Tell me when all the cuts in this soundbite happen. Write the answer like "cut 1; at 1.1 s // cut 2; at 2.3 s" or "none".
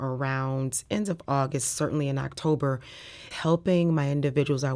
cut 1; at 3.3 s